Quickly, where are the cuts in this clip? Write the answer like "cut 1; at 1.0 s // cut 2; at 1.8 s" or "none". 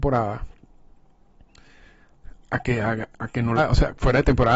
cut 1; at 2.4 s // cut 2; at 3.1 s // cut 3; at 3.6 s